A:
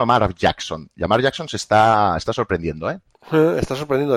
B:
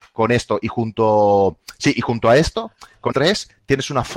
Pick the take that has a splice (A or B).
B